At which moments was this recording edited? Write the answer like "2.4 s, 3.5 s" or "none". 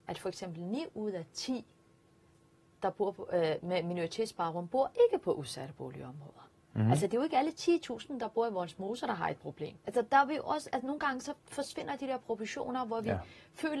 9.8 s

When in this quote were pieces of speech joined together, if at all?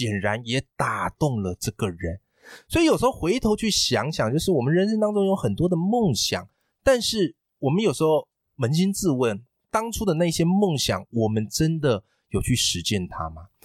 none

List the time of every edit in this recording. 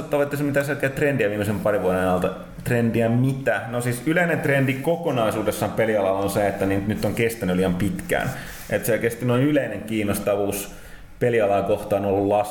none

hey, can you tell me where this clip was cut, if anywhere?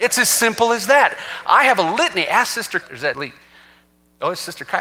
2.8 s, 3.1 s

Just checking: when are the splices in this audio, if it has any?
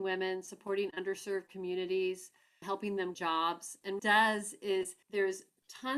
2.6 s, 3.1 s, 4.0 s, 5.0 s

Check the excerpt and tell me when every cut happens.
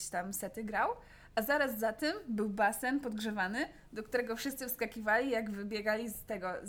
none

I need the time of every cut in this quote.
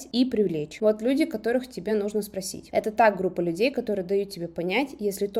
none

